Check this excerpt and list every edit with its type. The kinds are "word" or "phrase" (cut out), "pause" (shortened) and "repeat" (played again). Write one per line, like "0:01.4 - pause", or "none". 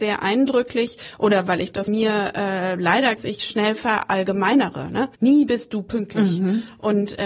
0:01.9 - word
0:03.2 - phrase
0:05.1 - pause